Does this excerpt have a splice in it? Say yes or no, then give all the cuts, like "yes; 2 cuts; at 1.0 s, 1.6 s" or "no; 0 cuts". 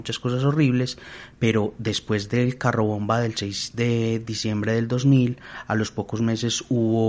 no; 0 cuts